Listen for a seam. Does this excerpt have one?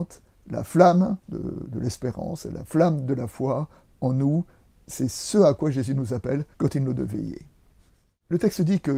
yes; 3 cuts; at 1.2 s, 6.5 s, 6.9 s

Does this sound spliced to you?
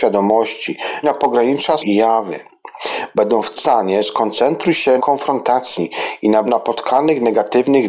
yes; 5 cuts; at 1.0 s, 1.8 s, 3.6 s, 5.0 s, 6.5 s

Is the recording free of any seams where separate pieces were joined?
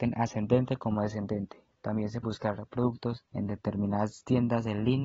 no; 2 cuts; at 2.2 s, 3.3 s

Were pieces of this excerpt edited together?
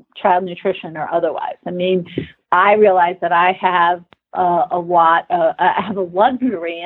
no; 0 cuts

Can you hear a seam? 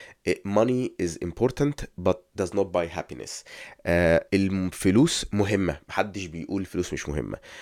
yes; 1 cut; at 4.3 s

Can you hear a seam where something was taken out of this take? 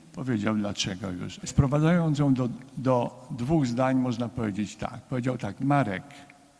no; 0 cuts

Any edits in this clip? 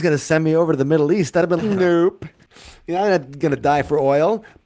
yes; 1 cut; at 1.6 s

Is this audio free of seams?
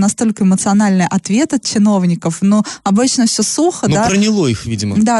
yes; 0 cuts

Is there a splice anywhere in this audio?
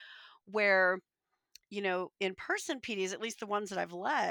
no; 0 cuts

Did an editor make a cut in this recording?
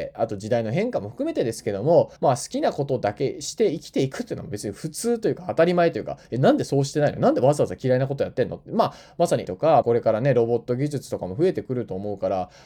yes; 3 cuts; at 2.2 s, 9.4 s, 9.8 s

